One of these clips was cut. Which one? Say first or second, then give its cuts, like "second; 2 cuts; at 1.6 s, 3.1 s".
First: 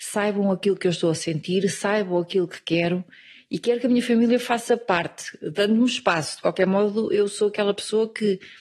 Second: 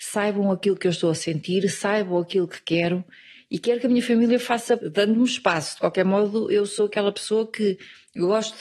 second; 1 cut; at 4.8 s